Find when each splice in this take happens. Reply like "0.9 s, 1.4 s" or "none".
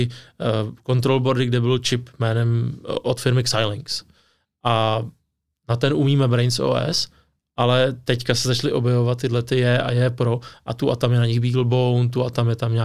none